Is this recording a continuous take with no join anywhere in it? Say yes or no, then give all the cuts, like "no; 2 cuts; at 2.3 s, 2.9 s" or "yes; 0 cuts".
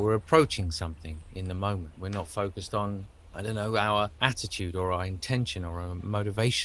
yes; 0 cuts